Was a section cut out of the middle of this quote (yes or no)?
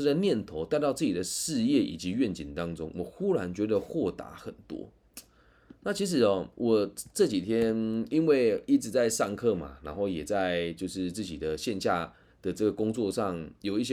no